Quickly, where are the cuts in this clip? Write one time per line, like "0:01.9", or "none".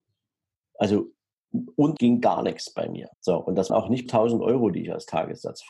0:02.0
0:03.1
0:03.7
0:04.1

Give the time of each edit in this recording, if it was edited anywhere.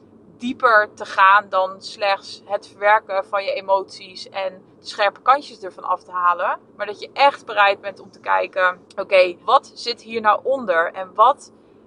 0:06.7
0:08.9
0:09.4

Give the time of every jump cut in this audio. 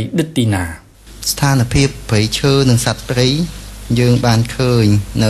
none

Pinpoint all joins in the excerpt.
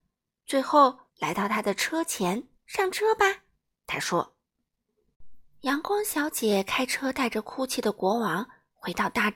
0:01.1
0:02.5

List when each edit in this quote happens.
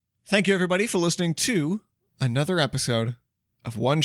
none

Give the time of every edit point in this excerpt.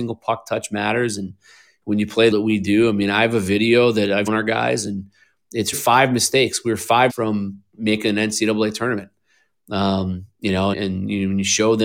0:02.3
0:04.3
0:05.7
0:07.1
0:10.7

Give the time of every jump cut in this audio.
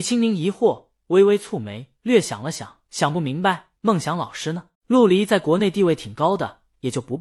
0:02.0
0:02.9
0:03.8
0:04.7

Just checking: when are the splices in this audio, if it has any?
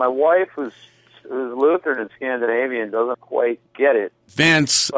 0:03.1
0:03.7

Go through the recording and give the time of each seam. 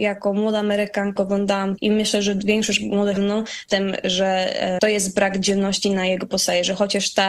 0:01.2
0:01.8
0:03.2
0:03.7
0:04.8

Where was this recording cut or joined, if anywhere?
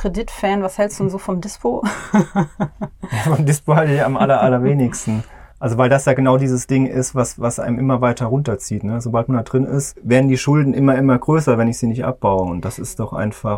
0:05.5

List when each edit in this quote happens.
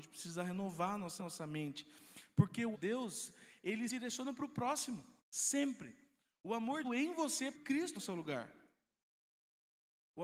0:01.2
0:02.7
0:03.9
0:05.2
0:06.8
0:07.5
0:08.0

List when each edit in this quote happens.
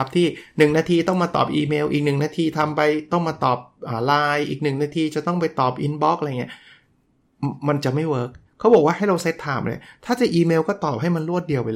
0:08.4

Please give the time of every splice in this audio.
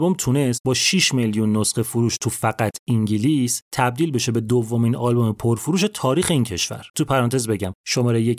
0:06.9

